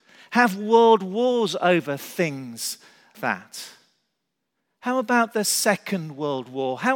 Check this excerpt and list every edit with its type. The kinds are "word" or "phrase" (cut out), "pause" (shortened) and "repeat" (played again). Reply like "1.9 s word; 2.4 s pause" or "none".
3.1 s word